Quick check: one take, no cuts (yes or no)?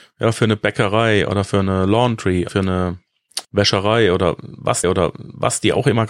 no